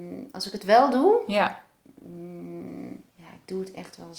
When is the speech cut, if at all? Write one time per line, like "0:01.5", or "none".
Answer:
0:03.1